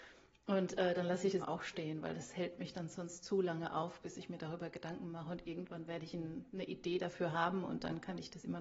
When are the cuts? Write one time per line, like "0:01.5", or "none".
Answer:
0:01.4